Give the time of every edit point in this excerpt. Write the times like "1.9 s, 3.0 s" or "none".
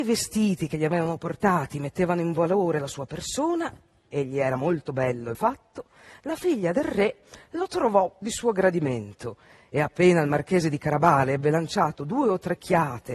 5.3 s, 8.2 s